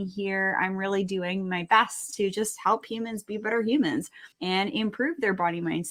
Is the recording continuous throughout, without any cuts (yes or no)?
no